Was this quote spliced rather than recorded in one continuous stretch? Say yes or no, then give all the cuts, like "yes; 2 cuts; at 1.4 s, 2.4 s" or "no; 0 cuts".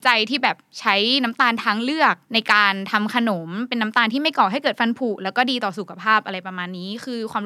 yes; 1 cut; at 2.2 s